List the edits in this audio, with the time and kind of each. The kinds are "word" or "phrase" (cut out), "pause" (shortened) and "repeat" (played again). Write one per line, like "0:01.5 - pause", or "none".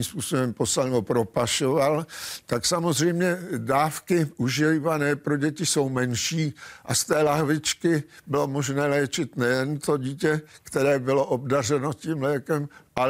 none